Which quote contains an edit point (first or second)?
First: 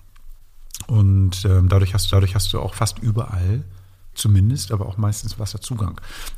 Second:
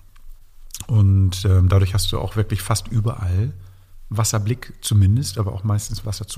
first